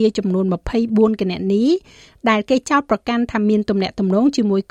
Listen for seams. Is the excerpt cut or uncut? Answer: uncut